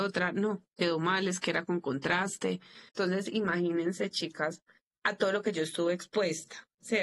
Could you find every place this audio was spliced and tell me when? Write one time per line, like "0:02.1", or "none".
0:02.9

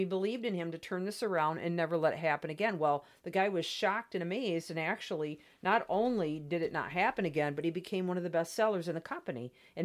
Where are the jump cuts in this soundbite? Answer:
none

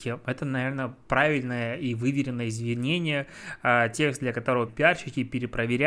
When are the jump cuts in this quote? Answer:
0:04.7

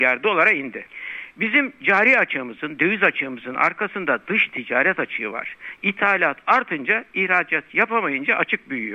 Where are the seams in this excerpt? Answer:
none

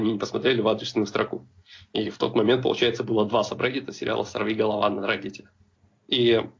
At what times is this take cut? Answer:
none

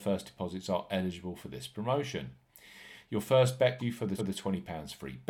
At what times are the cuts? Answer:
0:03.8
0:04.2

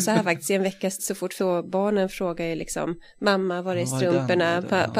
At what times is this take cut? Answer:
0:01.0
0:01.4

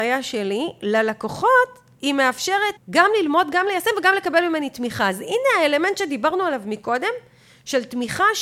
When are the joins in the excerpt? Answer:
0:02.8

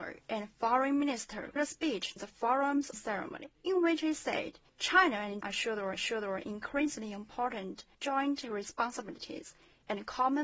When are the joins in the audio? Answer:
0:01.6
0:02.2
0:02.9
0:03.5
0:04.7
0:05.4
0:06.0

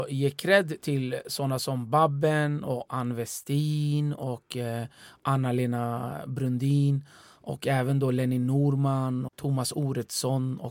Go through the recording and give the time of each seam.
0:09.3

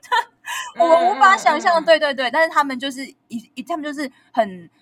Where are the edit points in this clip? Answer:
none

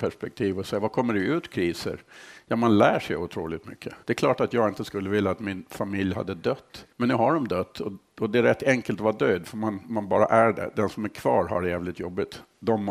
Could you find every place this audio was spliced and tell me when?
0:04.0
0:06.9

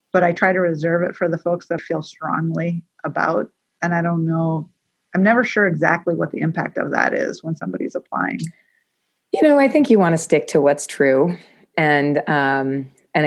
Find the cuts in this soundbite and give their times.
0:01.8

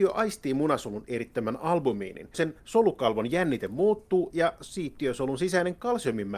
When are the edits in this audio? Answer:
0:02.3

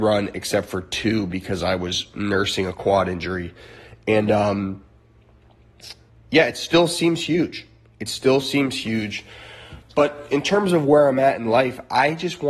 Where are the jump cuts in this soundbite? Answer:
0:06.1

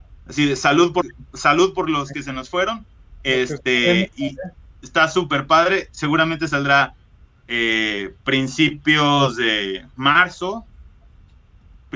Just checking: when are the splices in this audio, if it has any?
0:01.0

